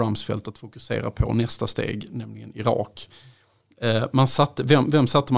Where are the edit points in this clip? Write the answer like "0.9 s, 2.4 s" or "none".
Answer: none

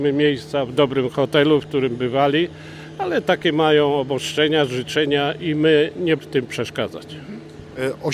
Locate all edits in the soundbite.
6.2 s

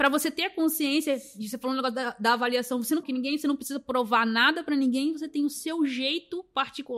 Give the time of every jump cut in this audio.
3.0 s

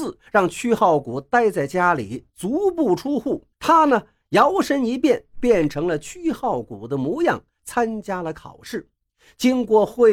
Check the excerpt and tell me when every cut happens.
3.5 s

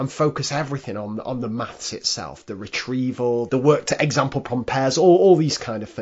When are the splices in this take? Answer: 3.5 s

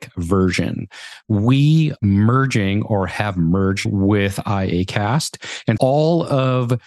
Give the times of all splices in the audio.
2.0 s, 3.9 s, 5.8 s

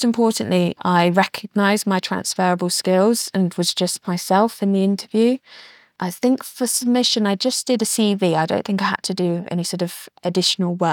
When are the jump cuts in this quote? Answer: none

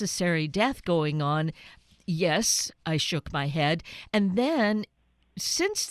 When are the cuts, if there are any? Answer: none

